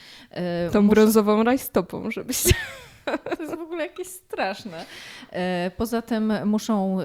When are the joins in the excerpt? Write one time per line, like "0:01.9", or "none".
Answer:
none